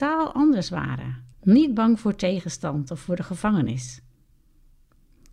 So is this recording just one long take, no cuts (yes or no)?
no